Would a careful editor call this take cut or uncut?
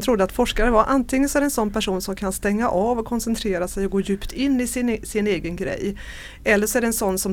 uncut